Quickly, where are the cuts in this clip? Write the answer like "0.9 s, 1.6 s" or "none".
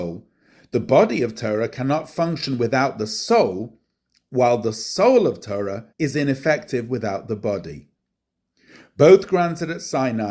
5.9 s